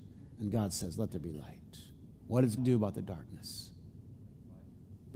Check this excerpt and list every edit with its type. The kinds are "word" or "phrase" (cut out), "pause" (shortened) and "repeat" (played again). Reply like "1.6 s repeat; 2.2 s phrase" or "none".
2.6 s word